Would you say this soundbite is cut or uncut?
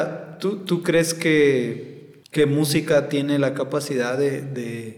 cut